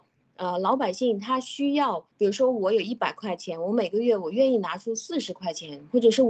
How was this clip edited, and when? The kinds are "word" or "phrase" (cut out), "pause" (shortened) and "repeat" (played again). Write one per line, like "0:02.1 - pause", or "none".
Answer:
0:02.1 - pause